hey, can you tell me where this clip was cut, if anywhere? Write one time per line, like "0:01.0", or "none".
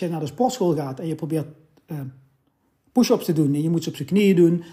none